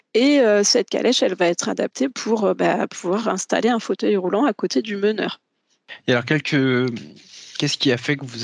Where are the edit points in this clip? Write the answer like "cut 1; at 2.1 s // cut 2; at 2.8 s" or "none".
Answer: none